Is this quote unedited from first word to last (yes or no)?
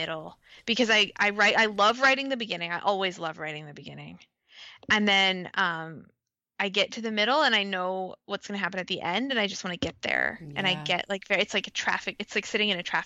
yes